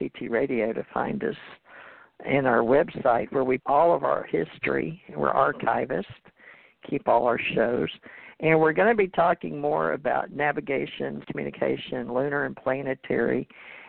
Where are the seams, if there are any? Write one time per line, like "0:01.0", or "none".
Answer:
0:03.6
0:11.2